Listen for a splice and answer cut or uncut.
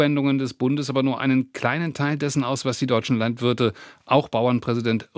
uncut